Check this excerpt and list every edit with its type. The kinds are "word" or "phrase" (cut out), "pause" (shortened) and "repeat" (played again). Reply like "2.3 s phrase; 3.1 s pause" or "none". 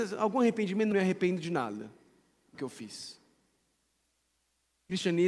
0.9 s phrase; 2.5 s phrase